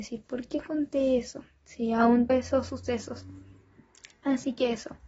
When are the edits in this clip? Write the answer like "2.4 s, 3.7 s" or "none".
2.3 s